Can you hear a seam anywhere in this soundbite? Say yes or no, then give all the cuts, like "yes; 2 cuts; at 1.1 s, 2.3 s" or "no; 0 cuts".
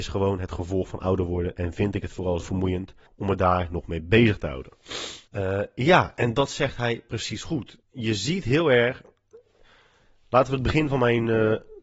yes; 4 cuts; at 2.4 s, 3.1 s, 5.3 s, 7.8 s